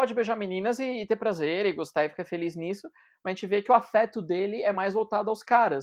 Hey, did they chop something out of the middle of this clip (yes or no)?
no